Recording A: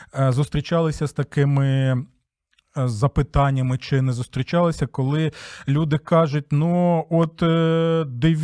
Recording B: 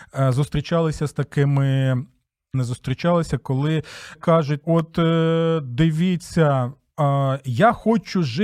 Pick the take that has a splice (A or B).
B